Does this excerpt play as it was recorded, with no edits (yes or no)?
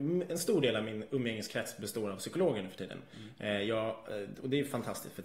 yes